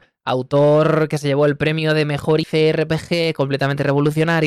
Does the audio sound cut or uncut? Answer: cut